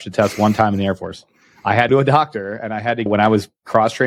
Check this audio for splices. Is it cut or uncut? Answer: cut